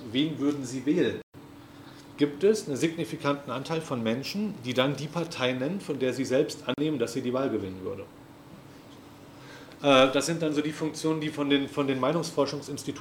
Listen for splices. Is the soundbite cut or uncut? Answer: uncut